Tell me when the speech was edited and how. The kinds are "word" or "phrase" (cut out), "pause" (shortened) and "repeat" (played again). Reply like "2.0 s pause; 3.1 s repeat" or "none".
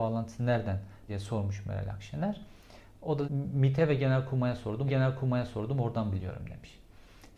1.1 s word; 3.2 s phrase; 4.9 s repeat